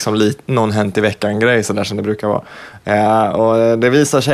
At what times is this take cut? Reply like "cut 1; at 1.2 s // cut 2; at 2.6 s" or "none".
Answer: none